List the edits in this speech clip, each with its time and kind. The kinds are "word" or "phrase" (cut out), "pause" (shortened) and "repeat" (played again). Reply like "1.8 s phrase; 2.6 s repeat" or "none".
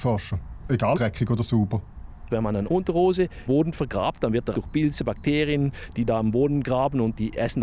0.9 s word; 3.5 s word; 4.5 s word